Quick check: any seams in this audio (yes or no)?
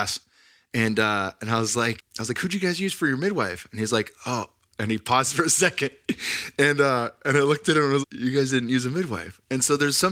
yes